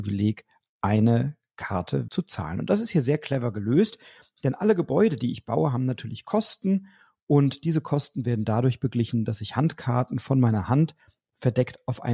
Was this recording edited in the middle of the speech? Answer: yes; 1 cut; at 2.1 s

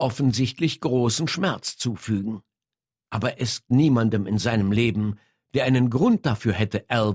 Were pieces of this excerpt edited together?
yes; 1 cut; at 3.7 s

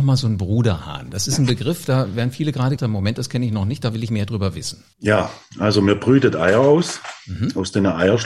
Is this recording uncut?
no; 2 cuts; at 2.8 s, 4.9 s

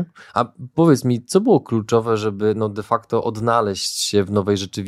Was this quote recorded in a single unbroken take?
yes; 0 cuts

